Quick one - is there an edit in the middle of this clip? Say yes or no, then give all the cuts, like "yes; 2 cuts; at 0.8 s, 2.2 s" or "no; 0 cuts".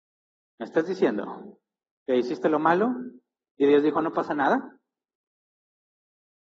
no; 0 cuts